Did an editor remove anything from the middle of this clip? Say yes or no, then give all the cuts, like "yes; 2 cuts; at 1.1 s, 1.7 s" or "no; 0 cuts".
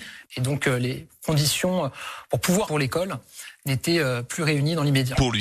yes; 1 cut; at 2.7 s